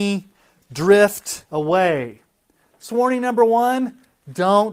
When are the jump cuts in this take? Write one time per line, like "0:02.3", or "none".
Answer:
0:01.4
0:02.9